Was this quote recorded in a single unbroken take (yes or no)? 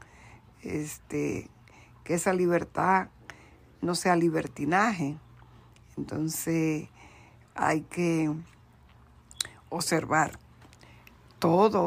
yes